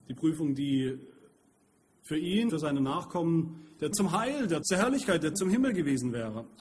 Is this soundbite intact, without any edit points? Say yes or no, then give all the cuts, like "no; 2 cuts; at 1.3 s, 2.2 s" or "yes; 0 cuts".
no; 4 cuts; at 2.5 s, 3.9 s, 4.6 s, 5.3 s